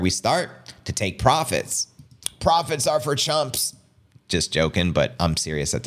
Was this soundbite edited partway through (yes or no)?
no